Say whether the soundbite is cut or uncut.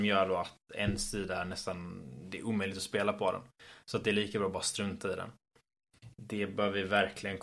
uncut